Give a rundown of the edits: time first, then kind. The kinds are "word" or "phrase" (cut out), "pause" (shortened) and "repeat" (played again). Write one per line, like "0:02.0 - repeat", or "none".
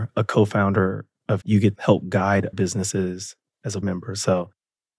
0:01.4 - phrase
0:01.7 - word
0:02.5 - word
0:03.8 - word